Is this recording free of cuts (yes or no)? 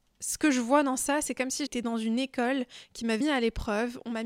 no